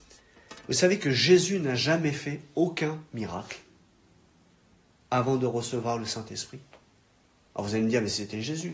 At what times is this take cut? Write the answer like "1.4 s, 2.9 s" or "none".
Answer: none